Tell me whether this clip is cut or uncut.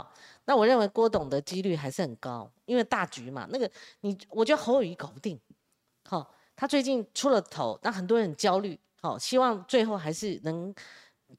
uncut